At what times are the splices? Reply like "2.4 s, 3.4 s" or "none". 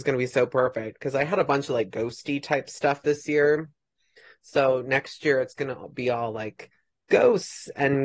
none